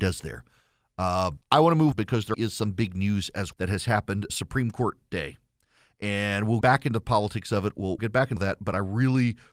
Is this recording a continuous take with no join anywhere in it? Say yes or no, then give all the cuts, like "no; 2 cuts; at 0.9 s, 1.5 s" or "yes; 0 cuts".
no; 8 cuts; at 1.4 s, 1.9 s, 2.3 s, 3.5 s, 4.3 s, 6.6 s, 8.0 s, 8.4 s